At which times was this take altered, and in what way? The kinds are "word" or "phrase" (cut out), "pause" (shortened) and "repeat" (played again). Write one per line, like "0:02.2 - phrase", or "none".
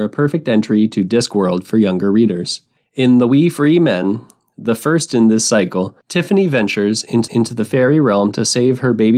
0:06.0 - pause
0:07.3 - repeat